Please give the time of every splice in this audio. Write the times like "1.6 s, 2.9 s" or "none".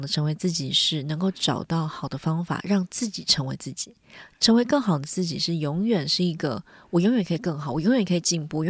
none